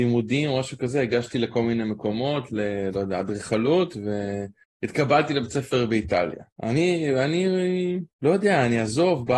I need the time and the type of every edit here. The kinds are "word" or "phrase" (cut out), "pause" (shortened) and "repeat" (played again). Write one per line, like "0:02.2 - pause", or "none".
0:04.6 - pause
0:06.5 - pause
0:08.1 - pause